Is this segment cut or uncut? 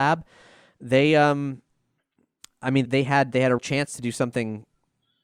cut